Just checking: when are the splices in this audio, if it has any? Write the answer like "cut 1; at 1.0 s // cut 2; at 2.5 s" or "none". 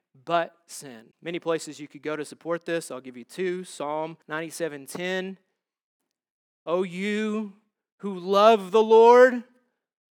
cut 1; at 1.1 s // cut 2; at 4.2 s